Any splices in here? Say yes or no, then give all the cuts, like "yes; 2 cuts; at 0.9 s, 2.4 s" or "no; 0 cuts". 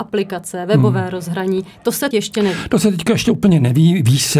yes; 1 cut; at 2.1 s